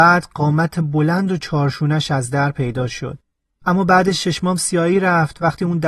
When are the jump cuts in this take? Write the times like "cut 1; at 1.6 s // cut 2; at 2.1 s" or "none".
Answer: none